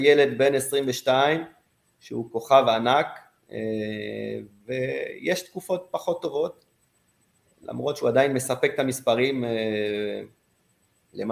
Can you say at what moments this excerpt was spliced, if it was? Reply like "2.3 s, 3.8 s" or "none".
none